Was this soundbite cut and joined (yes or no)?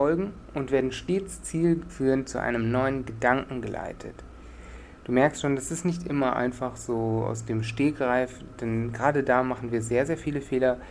no